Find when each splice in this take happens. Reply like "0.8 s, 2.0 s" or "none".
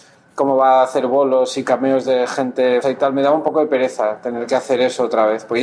2.8 s